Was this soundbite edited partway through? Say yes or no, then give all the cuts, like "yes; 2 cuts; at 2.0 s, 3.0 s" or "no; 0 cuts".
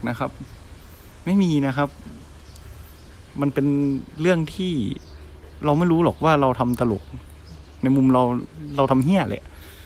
yes; 1 cut; at 3.3 s